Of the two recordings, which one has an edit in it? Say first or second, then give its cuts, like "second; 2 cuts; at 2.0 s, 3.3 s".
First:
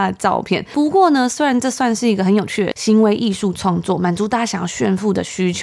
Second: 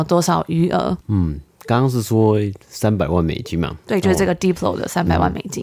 second; 2 cuts; at 1.0 s, 2.6 s